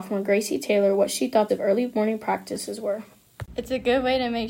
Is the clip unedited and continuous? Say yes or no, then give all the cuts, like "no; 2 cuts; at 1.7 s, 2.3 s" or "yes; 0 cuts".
no; 1 cut; at 1.5 s